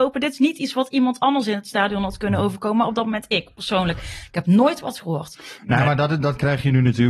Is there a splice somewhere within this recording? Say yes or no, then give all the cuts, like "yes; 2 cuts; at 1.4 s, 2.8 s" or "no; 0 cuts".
no; 0 cuts